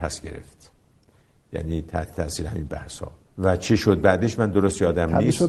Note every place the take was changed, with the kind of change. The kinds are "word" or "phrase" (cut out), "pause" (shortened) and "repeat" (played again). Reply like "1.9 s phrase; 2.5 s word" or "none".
3.3 s pause